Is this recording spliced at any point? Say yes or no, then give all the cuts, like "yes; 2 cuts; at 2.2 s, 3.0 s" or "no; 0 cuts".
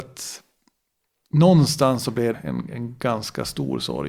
yes; 1 cut; at 2.3 s